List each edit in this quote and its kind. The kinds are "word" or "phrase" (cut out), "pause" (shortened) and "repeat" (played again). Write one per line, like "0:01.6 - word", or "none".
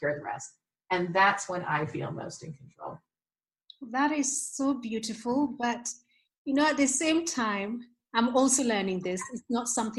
none